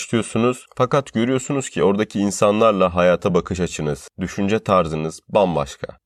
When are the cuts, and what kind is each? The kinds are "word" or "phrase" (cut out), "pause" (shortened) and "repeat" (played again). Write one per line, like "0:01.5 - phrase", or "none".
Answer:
none